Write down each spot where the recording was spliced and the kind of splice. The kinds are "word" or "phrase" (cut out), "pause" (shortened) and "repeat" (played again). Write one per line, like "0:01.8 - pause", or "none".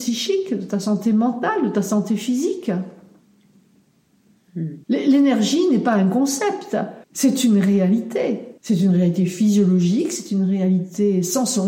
0:04.8 - pause
0:07.0 - pause
0:08.6 - pause